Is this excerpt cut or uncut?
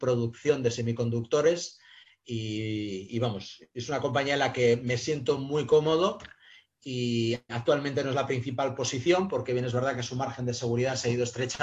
uncut